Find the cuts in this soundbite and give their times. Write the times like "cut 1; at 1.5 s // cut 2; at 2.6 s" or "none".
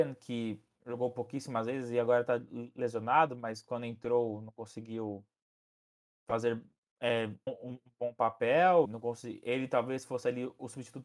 cut 1; at 7.5 s // cut 2; at 8.8 s